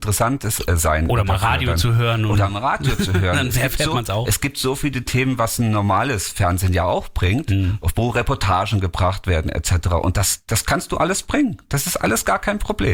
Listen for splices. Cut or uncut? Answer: uncut